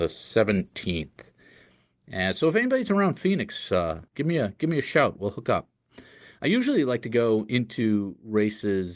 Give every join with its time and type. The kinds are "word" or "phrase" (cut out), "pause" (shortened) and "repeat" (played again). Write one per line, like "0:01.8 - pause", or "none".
0:04.1 - pause